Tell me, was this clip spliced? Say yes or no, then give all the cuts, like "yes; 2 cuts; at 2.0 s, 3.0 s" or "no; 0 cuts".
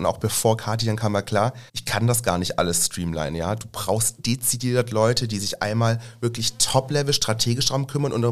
yes; 1 cut; at 1.7 s